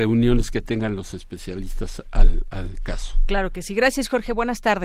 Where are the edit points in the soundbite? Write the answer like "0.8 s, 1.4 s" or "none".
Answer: none